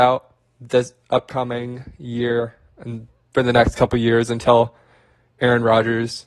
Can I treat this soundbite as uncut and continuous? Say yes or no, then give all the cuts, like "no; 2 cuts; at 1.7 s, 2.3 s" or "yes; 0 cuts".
yes; 0 cuts